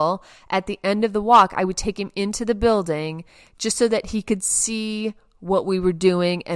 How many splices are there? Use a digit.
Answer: 0